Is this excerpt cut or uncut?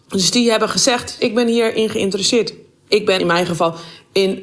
cut